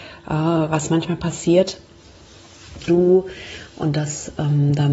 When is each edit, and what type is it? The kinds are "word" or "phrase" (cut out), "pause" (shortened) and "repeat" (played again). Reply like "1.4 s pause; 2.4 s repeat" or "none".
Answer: 2.9 s word